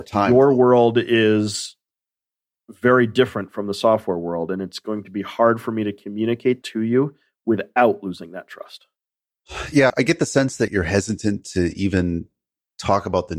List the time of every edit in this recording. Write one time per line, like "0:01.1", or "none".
0:06.6
0:09.9
0:10.7